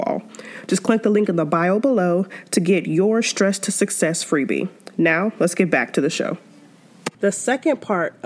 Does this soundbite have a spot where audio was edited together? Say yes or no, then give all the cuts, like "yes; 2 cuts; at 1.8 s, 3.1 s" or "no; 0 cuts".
yes; 1 cut; at 7.1 s